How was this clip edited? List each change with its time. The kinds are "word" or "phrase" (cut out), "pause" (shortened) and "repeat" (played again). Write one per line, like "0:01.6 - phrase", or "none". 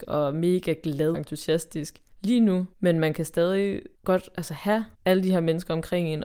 0:01.1 - word
0:02.1 - pause
0:02.7 - pause
0:03.9 - pause
0:04.9 - pause

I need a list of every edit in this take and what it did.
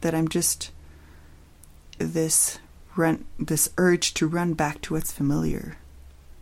0:02.0 - word

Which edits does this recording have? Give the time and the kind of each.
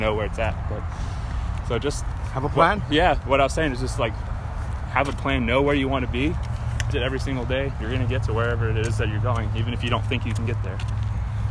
0:06.9 - phrase

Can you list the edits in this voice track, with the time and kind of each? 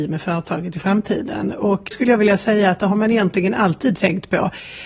0:01.9 - word

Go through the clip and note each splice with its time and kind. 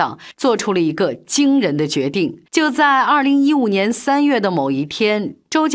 0:02.5 - pause

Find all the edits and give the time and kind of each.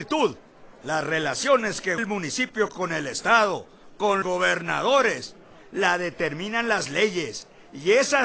0:02.0 - word
0:04.2 - word

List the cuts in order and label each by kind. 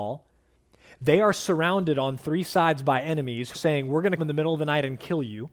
0:03.5 - word
0:04.2 - word

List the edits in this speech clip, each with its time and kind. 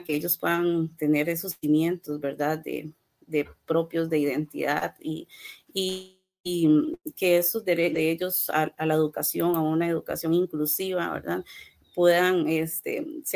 none

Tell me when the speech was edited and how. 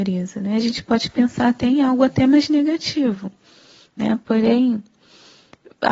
none

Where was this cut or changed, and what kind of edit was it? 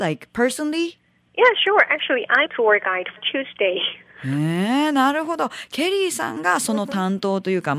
0:02.5 - word
0:03.2 - word

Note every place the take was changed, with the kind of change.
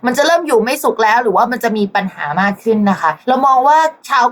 0:03.2 - pause

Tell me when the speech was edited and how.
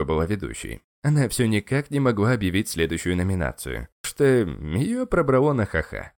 0:04.0 - word

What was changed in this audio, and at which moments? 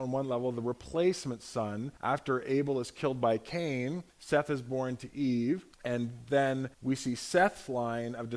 0:02.0 - pause
0:04.1 - pause
0:05.7 - pause
0:06.7 - pause

